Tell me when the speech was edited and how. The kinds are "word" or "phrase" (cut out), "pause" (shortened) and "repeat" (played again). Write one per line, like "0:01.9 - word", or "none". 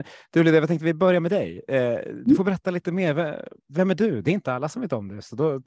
none